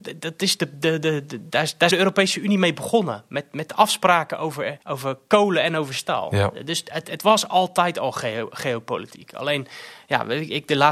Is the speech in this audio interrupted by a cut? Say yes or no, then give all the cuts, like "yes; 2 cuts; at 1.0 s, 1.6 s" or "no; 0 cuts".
yes; 2 cuts; at 1.9 s, 4.8 s